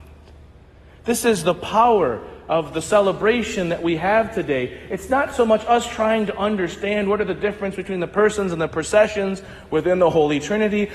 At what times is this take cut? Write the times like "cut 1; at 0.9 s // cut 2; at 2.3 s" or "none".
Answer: none